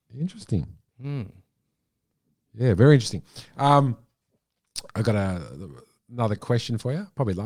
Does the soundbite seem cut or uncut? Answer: uncut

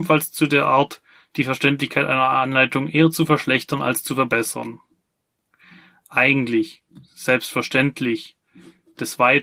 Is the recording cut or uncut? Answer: uncut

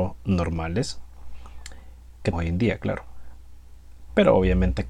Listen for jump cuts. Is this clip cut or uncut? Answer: cut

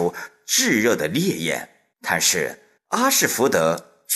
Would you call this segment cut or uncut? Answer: cut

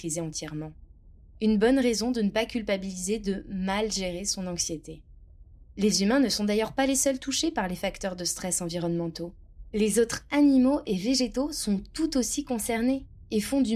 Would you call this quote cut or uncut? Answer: uncut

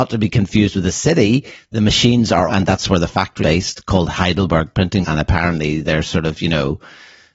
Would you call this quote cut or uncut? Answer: cut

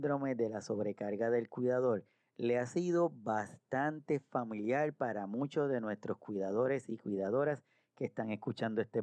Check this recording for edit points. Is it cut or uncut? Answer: uncut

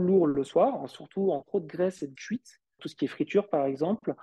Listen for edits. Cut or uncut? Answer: cut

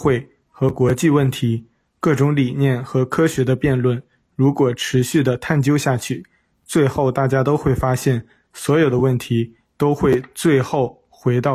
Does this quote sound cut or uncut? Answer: uncut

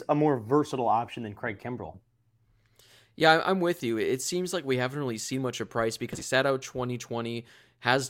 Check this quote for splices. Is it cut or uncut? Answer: uncut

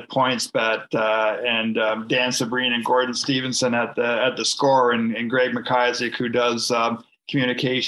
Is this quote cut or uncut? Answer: uncut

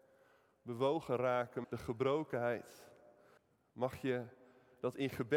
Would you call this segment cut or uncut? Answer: cut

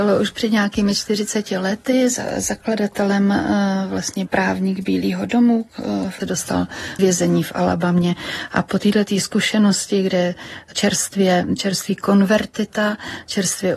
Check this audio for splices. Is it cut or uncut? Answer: cut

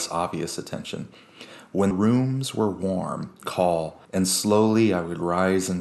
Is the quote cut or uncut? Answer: cut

